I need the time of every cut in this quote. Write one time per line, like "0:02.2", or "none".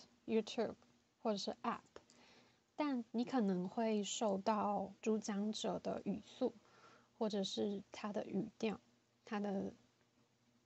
0:03.1
0:05.0

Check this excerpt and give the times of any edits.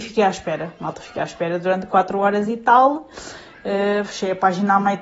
none

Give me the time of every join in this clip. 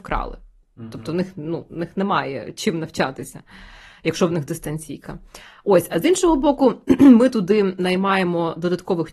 none

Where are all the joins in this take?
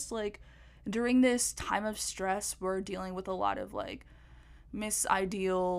none

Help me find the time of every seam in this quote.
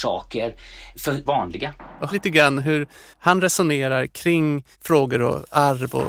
0:01.3
0:02.1
0:03.1
0:04.7

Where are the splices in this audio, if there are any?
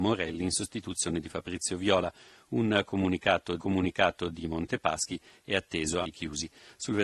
0:03.6
0:06.0

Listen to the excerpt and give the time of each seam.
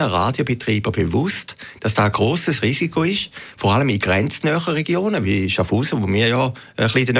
none

